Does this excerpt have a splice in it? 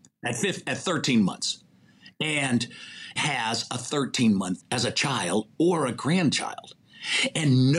yes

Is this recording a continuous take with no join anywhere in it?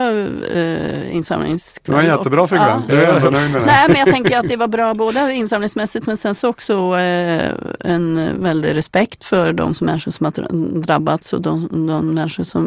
yes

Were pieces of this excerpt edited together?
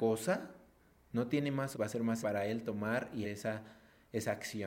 yes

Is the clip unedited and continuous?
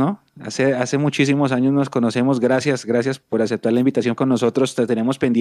no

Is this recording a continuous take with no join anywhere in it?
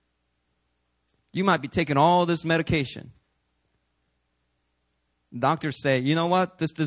yes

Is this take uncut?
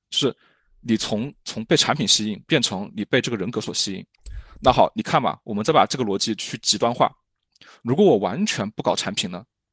yes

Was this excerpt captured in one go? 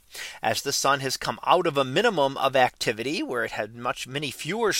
yes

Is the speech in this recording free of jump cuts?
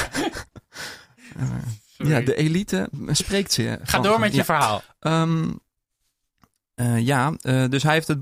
yes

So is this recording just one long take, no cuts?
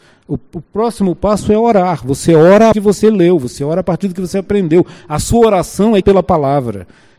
no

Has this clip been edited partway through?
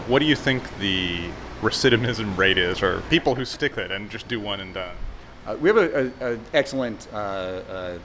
yes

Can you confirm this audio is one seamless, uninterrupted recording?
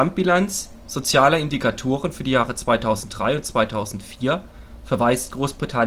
yes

